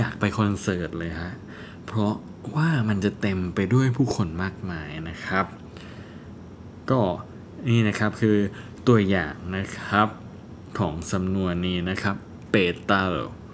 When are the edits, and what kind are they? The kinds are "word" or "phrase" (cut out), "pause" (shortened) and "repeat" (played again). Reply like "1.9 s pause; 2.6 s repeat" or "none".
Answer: 12.5 s word